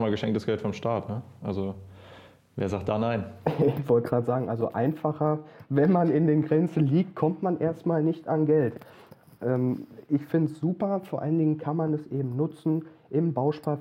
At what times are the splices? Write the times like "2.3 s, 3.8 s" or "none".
none